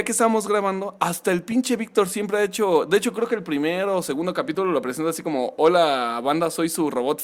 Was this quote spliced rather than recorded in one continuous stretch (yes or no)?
no